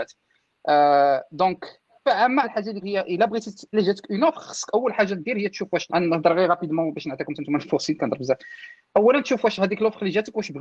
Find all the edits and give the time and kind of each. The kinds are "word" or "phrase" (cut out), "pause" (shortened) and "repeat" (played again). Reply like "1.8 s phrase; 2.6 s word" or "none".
2.1 s word; 2.4 s word; 2.8 s word; 3.7 s word; 5.9 s word; 8.0 s word